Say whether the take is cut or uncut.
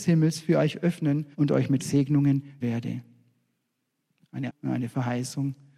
cut